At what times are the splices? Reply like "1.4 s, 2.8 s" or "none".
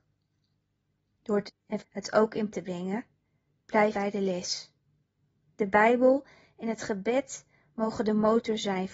1.5 s, 1.8 s, 2.5 s, 3.9 s